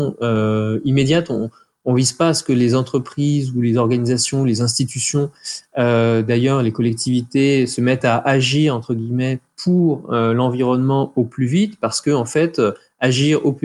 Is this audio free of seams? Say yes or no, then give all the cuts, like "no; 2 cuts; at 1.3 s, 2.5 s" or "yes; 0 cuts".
yes; 0 cuts